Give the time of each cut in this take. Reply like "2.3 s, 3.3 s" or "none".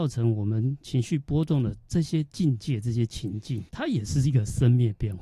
3.7 s